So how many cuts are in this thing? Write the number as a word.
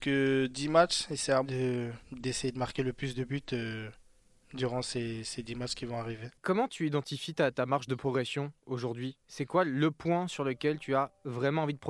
two